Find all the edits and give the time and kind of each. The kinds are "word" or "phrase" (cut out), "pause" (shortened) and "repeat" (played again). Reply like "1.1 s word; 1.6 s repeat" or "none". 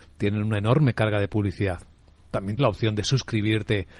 2.6 s word

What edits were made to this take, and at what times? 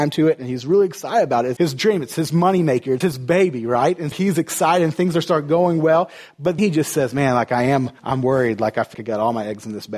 1.6 s word; 3.0 s phrase; 4.1 s word; 6.6 s word; 8.0 s pause; 8.9 s word

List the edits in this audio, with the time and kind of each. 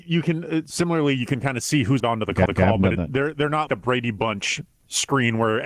2.0 s word; 2.5 s repeat; 3.7 s word

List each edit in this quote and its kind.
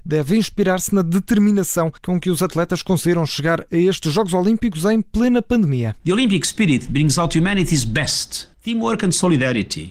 2.0 s pause; 6.0 s pause; 8.5 s pause

